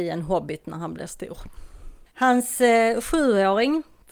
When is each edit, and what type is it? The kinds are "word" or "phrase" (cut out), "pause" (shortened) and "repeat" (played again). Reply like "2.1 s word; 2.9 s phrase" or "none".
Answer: 2.1 s pause